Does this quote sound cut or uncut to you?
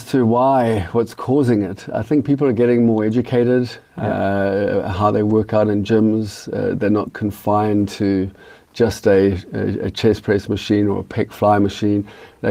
uncut